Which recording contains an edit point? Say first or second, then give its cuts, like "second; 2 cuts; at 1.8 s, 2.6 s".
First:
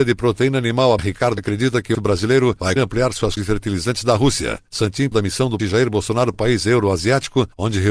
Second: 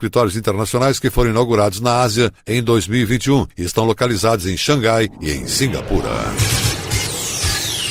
first; 8 cuts; at 1.0 s, 1.4 s, 1.9 s, 2.8 s, 3.4 s, 5.1 s, 5.6 s, 6.3 s